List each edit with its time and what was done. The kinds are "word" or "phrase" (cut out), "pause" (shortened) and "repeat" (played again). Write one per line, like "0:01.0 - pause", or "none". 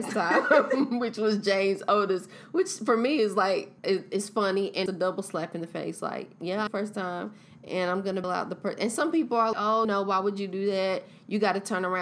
0:03.8 - pause
0:04.9 - word
0:06.7 - phrase
0:08.2 - word
0:09.5 - word
0:09.8 - word